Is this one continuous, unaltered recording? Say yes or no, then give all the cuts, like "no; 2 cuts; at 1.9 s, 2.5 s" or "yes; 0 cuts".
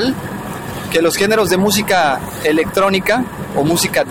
yes; 0 cuts